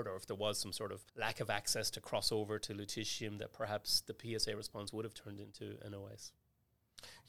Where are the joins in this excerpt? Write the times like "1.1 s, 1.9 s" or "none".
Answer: 1.1 s